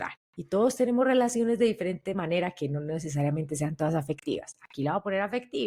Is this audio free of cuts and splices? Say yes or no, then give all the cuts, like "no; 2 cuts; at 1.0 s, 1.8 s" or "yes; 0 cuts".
yes; 0 cuts